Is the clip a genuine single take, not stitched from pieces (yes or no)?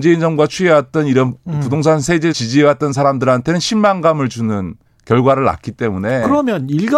no